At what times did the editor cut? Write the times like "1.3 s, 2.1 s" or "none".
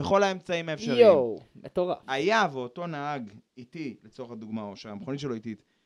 3.5 s

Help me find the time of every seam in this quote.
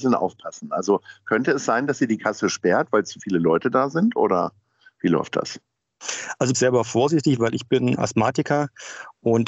6.5 s

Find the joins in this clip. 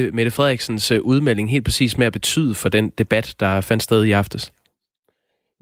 none

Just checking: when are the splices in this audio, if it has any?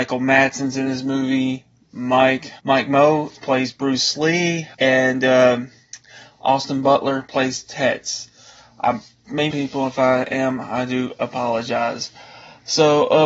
2.6 s, 4.7 s, 9.5 s

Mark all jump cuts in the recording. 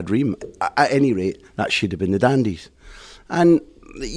1.5 s

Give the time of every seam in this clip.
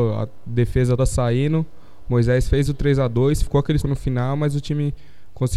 1.0 s, 3.8 s

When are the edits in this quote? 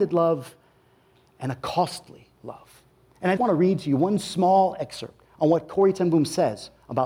2.9 s, 3.4 s

